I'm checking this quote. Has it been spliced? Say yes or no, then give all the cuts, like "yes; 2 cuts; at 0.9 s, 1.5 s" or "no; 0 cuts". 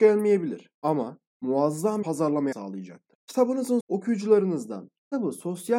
yes; 3 cuts; at 2.0 s, 2.5 s, 3.8 s